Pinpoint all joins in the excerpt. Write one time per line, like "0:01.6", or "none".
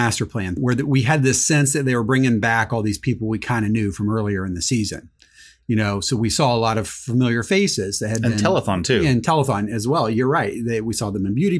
none